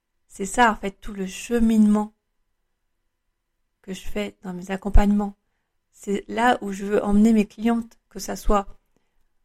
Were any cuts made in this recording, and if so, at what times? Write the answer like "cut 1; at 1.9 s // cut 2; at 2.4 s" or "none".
none